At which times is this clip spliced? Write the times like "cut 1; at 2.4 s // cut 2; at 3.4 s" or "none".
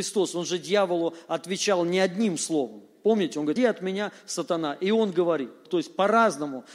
cut 1; at 3.6 s // cut 2; at 5.7 s

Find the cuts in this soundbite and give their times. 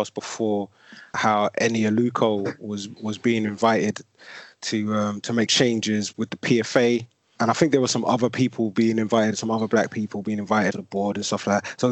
cut 1; at 1.1 s // cut 2; at 5.5 s // cut 3; at 7.4 s // cut 4; at 10.7 s

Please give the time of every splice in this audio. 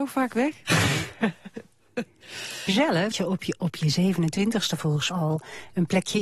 cut 1; at 2.7 s // cut 2; at 3.1 s // cut 3; at 5.1 s

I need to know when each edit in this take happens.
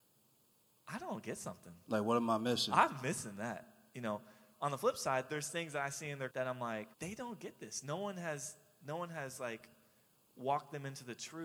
cut 1; at 6.3 s // cut 2; at 6.9 s

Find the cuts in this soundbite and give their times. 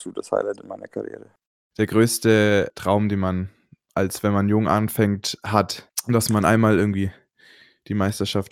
none

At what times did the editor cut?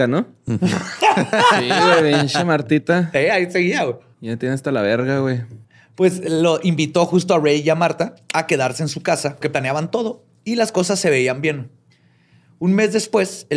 cut 1; at 4.1 s // cut 2; at 5.6 s // cut 3; at 9.4 s

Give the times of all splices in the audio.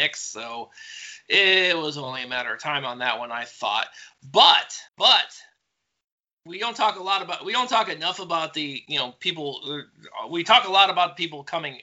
cut 1; at 4.9 s

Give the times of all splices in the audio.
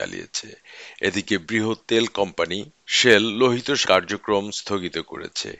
cut 1; at 3.8 s

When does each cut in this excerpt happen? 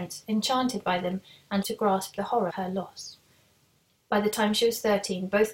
cut 1; at 1.6 s // cut 2; at 2.5 s

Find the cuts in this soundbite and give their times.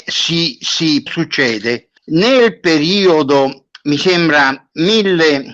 cut 1; at 1.1 s // cut 2; at 2.0 s

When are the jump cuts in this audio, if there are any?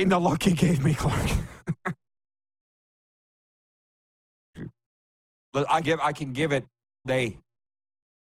cut 1; at 5.8 s // cut 2; at 7.0 s

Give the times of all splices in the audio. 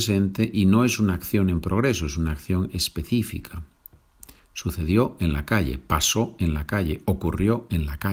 none

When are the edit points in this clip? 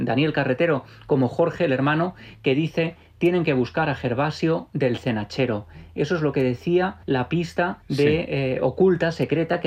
cut 1; at 7.0 s // cut 2; at 7.8 s

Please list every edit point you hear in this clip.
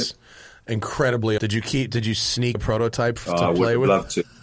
cut 1; at 1.4 s // cut 2; at 2.5 s // cut 3; at 3.3 s

